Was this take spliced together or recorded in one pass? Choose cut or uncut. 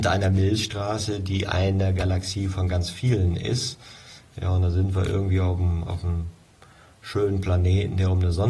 uncut